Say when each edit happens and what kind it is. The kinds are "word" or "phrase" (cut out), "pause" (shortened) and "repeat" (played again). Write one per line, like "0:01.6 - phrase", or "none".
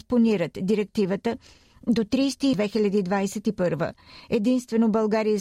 0:02.5 - word